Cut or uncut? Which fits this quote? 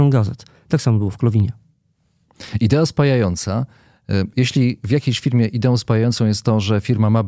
uncut